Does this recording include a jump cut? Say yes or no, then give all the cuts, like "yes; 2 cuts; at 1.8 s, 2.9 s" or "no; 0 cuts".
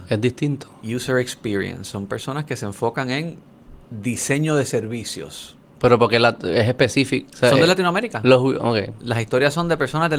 yes; 2 cuts; at 3.8 s, 5.7 s